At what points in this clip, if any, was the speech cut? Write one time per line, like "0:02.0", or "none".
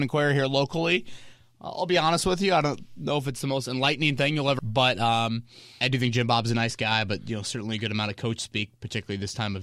0:04.6
0:05.8